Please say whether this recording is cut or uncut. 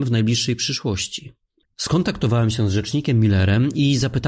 uncut